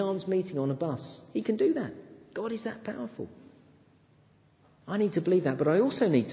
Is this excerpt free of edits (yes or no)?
yes